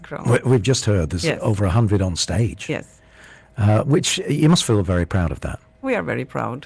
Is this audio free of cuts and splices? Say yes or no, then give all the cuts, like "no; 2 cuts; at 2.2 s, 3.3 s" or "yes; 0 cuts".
yes; 0 cuts